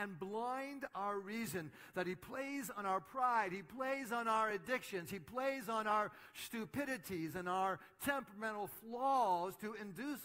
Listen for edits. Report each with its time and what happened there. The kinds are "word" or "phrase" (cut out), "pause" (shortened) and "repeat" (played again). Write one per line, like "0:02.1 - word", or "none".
none

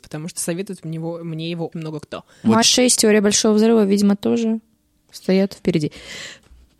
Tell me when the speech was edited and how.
0:01.7 - word
0:02.6 - word
0:02.9 - word

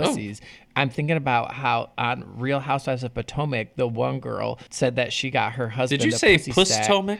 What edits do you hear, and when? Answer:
0:04.7 - pause

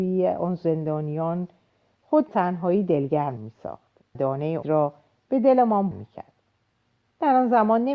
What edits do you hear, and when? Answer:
0:02.3 - word
0:03.4 - word
0:04.1 - word
0:04.6 - word
0:05.9 - word

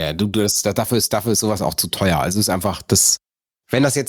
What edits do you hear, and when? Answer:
none

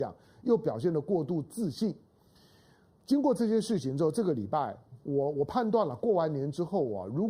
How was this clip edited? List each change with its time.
none

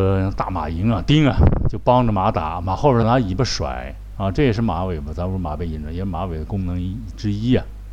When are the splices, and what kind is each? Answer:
0:03.0 - phrase

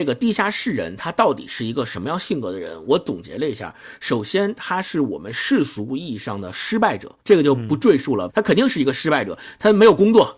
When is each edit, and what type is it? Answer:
0:07.2 - pause
0:08.3 - phrase

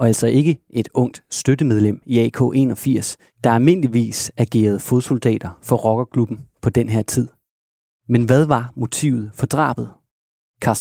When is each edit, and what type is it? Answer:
none

